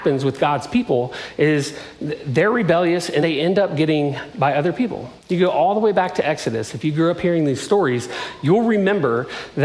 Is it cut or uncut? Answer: cut